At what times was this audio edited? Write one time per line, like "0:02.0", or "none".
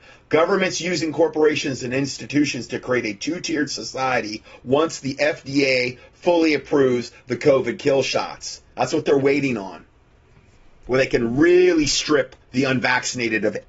0:12.4